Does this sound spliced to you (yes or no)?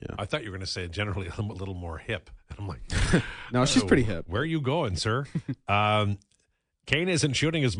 no